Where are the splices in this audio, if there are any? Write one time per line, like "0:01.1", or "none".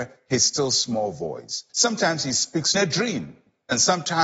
0:01.7
0:02.7